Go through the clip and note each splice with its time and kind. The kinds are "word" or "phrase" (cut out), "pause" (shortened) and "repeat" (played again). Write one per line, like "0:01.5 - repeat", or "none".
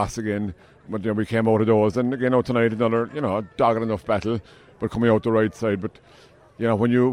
none